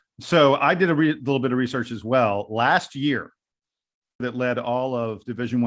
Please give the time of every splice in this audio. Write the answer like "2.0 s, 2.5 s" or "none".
4.2 s